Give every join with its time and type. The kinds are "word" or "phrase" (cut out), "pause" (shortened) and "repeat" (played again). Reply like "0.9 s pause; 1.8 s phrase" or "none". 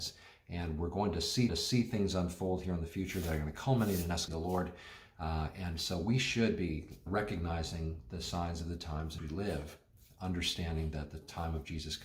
1.5 s repeat; 4.3 s phrase; 7.1 s word; 9.2 s word

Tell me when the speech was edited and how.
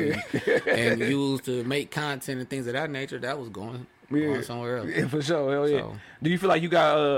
none

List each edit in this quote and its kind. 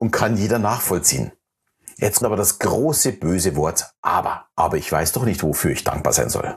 2.2 s word; 4.5 s pause

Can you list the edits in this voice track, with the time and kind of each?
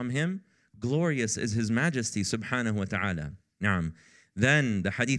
3.5 s pause

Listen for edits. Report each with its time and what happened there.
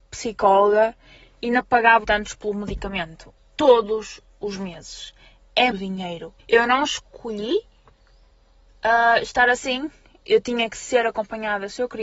2.0 s word; 3.4 s pause; 5.7 s word; 6.4 s pause

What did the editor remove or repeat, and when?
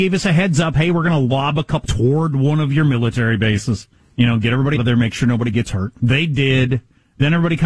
1.8 s word; 4.0 s pause; 4.8 s word

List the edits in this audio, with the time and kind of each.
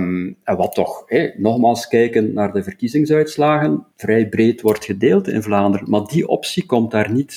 3.9 s pause

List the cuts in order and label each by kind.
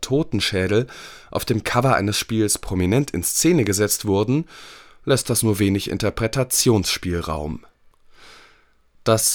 none

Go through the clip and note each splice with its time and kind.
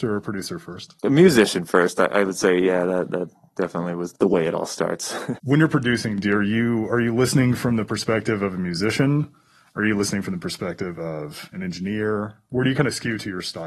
none

